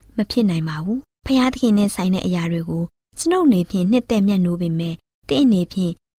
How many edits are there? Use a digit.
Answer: 0